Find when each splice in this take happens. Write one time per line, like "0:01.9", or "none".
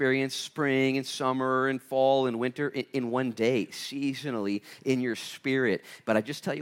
none